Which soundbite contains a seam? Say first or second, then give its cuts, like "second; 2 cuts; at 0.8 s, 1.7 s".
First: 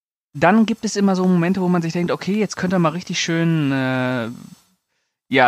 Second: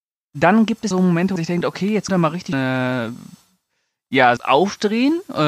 second; 5 cuts; at 0.9 s, 1.4 s, 2.1 s, 2.5 s, 4.4 s